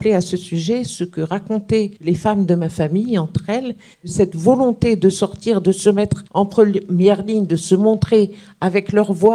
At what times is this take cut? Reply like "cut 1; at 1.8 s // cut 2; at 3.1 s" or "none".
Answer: cut 1; at 2.0 s // cut 2; at 3.9 s // cut 3; at 6.3 s